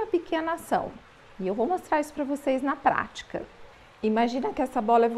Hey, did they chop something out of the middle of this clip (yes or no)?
no